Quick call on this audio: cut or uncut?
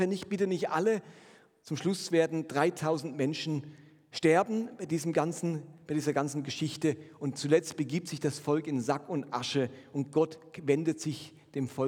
uncut